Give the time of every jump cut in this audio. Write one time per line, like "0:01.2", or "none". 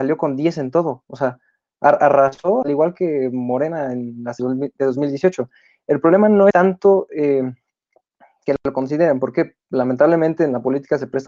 0:02.6
0:04.4
0:06.5